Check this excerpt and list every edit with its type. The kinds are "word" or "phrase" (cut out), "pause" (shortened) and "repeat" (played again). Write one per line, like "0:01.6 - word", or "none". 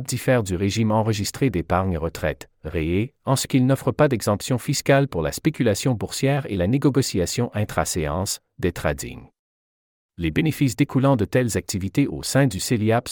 none